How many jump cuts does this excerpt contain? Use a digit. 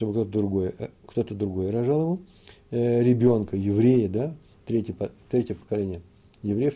0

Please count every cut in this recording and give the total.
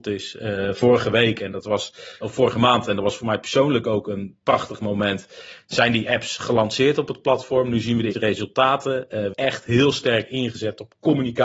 3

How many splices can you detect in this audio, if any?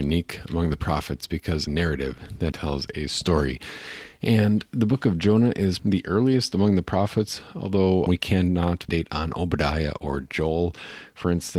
5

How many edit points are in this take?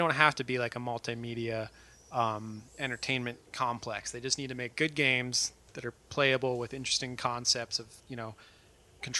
2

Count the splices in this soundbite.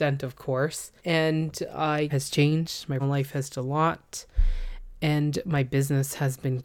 4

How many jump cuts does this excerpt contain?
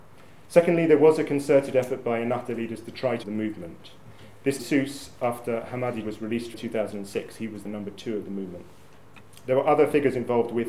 5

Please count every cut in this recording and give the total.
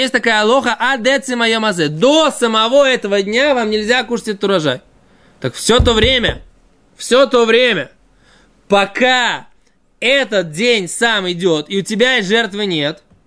0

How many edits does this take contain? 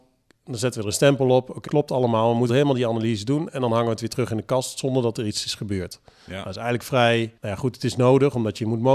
3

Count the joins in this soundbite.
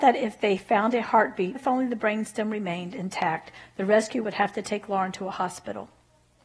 2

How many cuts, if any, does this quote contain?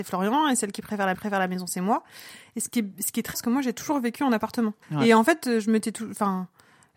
3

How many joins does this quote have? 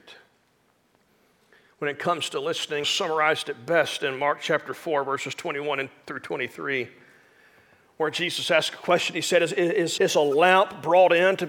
2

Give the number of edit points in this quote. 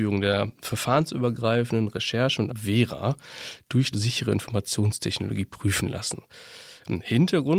2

